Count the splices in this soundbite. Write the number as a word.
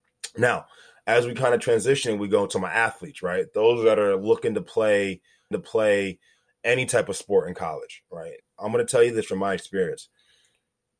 two